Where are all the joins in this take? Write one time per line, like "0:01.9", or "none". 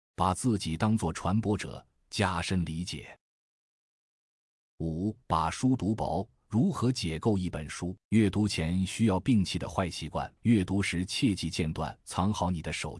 0:05.2
0:08.0
0:10.4
0:12.0